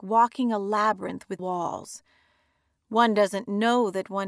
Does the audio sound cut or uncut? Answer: cut